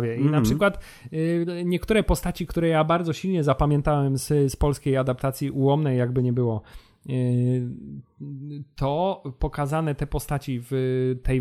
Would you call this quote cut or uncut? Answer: uncut